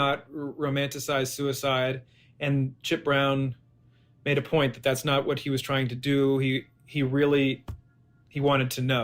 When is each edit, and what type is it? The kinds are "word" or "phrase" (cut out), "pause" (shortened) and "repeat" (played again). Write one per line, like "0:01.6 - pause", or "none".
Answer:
none